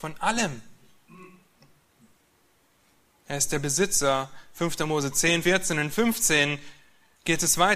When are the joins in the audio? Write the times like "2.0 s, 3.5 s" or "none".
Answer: 5.4 s, 5.9 s